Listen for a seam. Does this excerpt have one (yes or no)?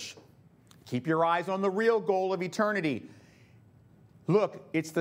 no